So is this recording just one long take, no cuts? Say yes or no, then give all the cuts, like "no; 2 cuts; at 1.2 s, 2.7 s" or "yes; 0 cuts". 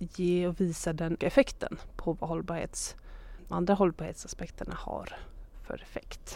no; 2 cuts; at 1.2 s, 3.5 s